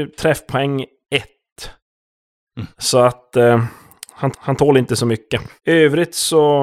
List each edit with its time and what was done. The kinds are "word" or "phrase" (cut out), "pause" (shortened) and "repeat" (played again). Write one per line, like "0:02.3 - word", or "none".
0:02.7 - pause
0:04.3 - repeat
0:05.6 - pause